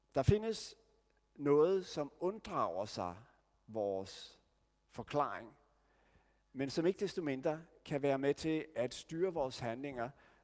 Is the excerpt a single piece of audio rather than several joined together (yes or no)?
yes